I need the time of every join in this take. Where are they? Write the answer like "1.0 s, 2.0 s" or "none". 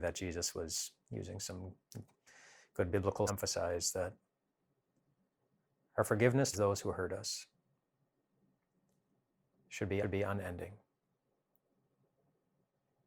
3.3 s, 6.5 s, 10.0 s

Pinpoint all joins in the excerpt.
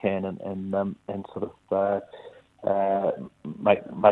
none

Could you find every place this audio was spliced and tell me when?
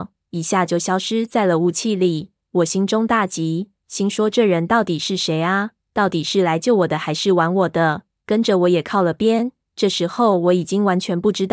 none

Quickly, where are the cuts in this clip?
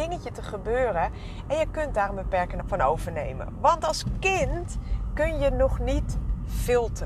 2.6 s

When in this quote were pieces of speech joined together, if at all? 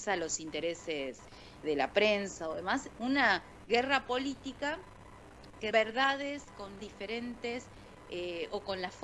1.6 s, 5.7 s, 6.8 s

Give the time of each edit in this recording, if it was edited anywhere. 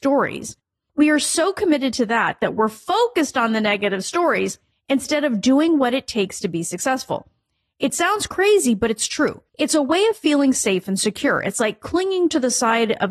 4.7 s, 9.5 s

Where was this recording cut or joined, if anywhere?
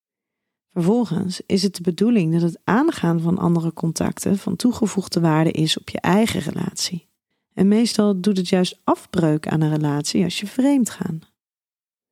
7.3 s

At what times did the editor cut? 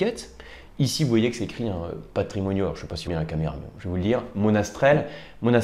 3.1 s

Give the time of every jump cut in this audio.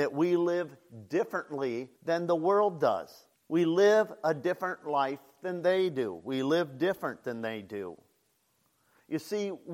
2.0 s, 3.3 s

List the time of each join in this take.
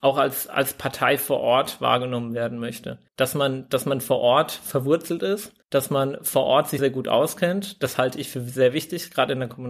3.1 s, 5.6 s, 6.8 s

